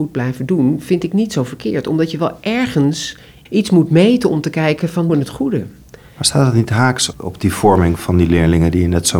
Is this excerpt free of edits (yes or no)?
no